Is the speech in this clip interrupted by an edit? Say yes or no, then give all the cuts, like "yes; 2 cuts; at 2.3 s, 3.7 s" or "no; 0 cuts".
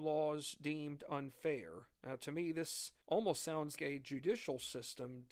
yes; 3 cuts; at 1.9 s, 3.0 s, 3.8 s